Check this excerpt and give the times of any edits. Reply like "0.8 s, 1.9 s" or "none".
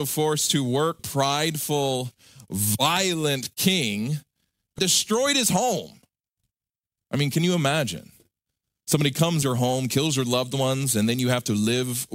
1.0 s, 4.8 s, 9.4 s